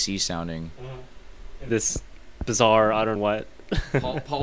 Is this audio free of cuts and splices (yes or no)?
no